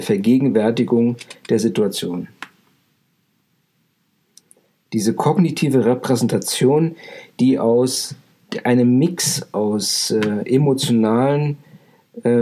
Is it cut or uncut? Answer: uncut